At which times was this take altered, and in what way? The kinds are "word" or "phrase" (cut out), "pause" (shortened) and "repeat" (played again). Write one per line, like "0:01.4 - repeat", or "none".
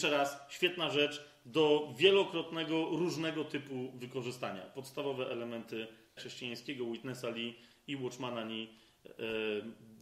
0:06.2 - word